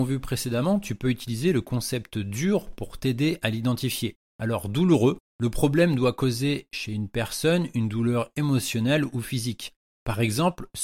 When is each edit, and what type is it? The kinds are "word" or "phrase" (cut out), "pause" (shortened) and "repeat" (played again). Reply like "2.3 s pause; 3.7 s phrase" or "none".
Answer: none